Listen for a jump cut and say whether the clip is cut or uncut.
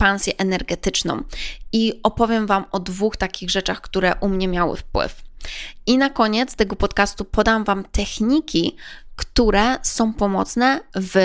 uncut